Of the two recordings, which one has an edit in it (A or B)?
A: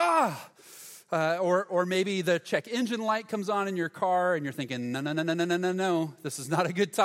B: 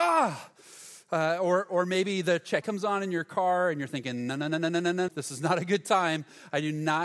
B